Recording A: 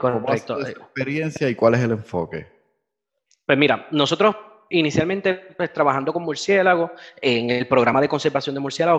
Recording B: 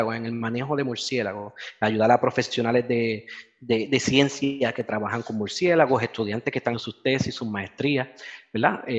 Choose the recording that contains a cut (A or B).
B